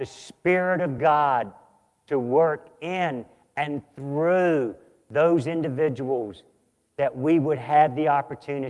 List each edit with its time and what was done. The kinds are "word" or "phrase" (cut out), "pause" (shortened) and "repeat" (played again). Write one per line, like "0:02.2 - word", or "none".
none